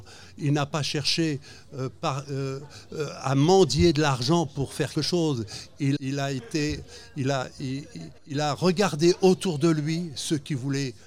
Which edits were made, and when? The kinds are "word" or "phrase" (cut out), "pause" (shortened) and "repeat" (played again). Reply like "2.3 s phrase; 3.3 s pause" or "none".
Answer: 4.9 s word; 6.0 s word; 8.2 s pause